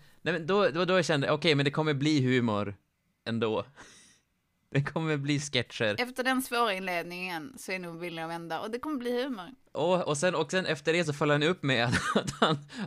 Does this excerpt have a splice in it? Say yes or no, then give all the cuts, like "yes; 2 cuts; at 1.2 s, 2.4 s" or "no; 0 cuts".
no; 0 cuts